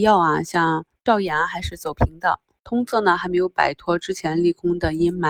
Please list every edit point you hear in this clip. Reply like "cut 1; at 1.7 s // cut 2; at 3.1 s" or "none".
none